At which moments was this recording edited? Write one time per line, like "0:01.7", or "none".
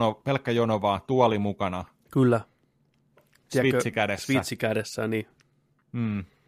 none